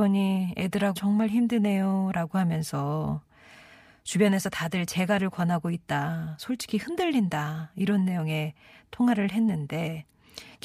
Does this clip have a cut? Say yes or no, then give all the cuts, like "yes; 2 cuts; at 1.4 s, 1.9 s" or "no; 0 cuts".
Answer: yes; 1 cut; at 0.9 s